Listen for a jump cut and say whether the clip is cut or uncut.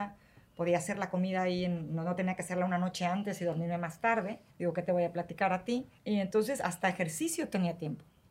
cut